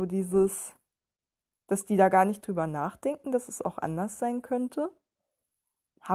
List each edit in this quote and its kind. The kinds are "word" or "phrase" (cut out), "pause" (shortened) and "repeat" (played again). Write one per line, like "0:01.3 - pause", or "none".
none